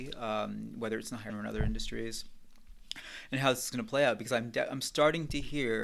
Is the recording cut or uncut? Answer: cut